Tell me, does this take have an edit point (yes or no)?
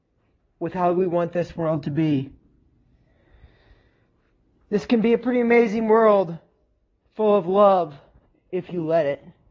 no